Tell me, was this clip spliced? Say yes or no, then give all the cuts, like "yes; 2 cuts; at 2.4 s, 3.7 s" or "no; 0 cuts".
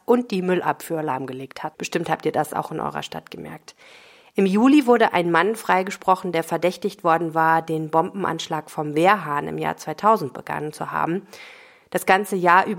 no; 0 cuts